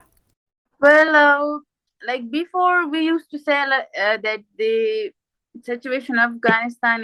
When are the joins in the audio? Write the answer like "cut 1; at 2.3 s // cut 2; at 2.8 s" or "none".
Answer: none